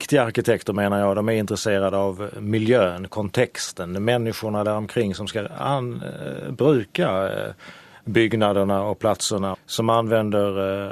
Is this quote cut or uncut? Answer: cut